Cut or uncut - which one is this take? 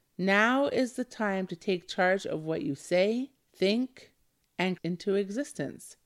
cut